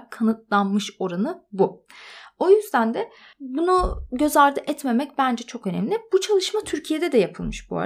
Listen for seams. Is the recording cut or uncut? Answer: uncut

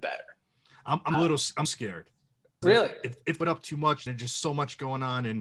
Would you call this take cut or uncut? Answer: cut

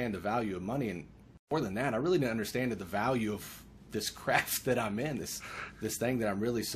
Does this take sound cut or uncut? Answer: cut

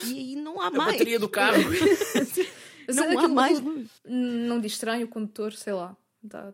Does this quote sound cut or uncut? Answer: cut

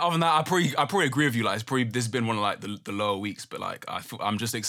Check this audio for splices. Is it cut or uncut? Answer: uncut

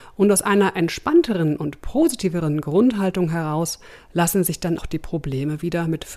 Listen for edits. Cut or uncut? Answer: cut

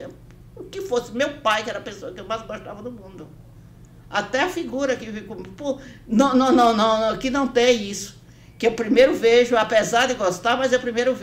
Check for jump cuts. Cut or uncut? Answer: uncut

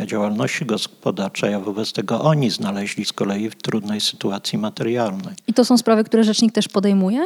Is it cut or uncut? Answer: cut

